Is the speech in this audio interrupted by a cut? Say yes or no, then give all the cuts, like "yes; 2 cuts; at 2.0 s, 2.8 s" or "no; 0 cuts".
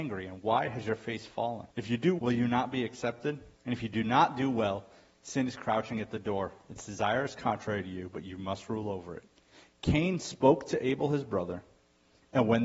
yes; 3 cuts; at 1.7 s, 2.2 s, 3.5 s